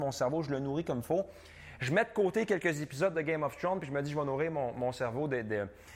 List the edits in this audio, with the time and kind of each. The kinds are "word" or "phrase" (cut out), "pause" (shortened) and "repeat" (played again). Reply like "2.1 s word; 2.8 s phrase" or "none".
none